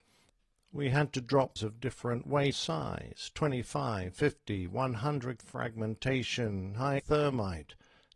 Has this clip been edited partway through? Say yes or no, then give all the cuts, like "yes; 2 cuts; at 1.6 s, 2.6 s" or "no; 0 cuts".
yes; 4 cuts; at 1.6 s, 2.5 s, 5.4 s, 7.0 s